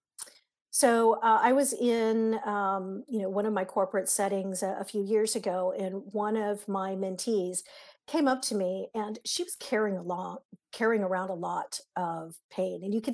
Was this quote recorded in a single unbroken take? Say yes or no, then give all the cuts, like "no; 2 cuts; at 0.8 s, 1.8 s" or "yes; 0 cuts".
yes; 0 cuts